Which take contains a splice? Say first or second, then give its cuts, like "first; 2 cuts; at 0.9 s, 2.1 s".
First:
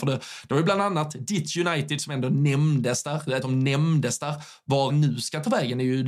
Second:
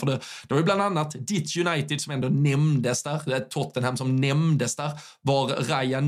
first; 2 cuts; at 3.4 s, 4.9 s